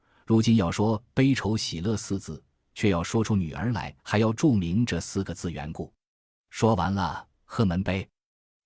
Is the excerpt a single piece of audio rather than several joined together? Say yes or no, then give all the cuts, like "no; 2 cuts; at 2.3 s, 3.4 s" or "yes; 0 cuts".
no; 1 cut; at 4.0 s